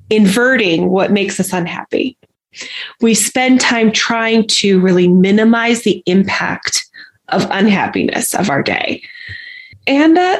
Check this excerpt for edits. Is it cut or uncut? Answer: uncut